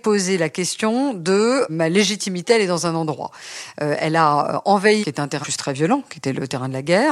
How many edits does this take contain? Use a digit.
3